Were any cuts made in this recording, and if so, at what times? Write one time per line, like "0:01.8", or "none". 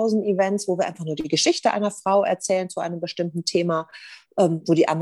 none